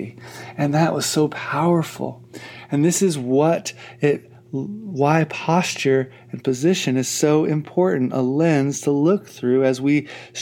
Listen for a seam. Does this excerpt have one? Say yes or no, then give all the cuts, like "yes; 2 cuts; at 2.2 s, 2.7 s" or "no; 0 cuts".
no; 0 cuts